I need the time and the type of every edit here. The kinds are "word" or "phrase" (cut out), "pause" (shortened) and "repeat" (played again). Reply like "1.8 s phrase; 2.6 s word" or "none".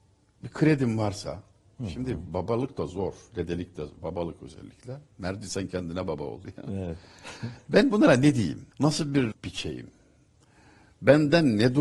6.4 s word; 8.7 s pause; 9.3 s word